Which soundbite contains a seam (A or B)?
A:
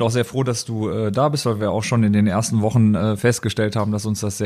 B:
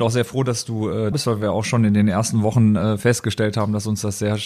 B